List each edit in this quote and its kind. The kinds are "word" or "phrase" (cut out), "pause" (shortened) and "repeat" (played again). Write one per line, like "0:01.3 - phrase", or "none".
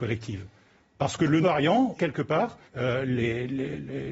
0:01.4 - word
0:02.0 - word
0:02.7 - pause